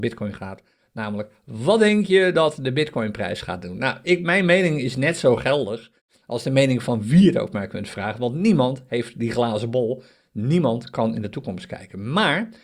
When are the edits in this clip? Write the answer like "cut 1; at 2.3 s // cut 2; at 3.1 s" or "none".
none